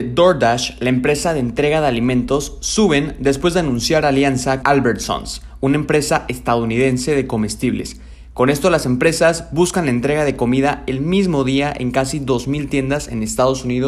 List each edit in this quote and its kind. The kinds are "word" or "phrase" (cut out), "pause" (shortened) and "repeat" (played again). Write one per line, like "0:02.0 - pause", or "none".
0:04.6 - word

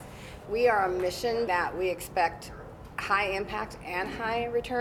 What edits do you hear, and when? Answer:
0:01.5 - phrase

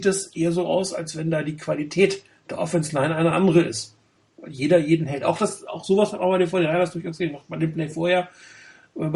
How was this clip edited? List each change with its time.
none

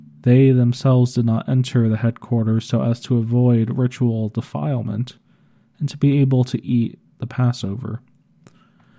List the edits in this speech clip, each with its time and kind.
none

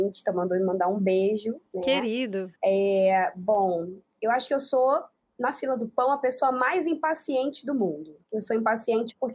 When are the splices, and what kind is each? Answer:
0:01.7 - pause
0:02.6 - pause
0:08.2 - pause

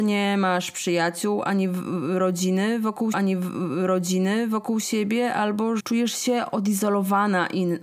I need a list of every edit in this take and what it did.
0:03.1 - repeat
0:05.8 - word

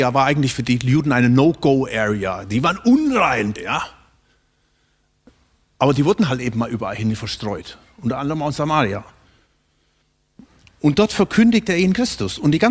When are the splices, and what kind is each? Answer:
0:03.6 - word

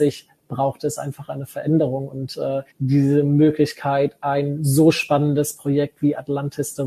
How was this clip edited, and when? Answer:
0:02.7 - pause

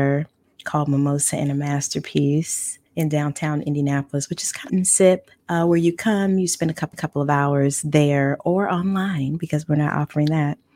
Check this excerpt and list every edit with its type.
0:02.9 - pause
0:04.7 - phrase
0:05.4 - pause
0:06.9 - repeat

